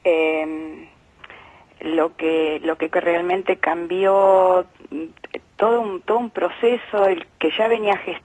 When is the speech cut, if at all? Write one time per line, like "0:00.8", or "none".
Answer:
0:02.9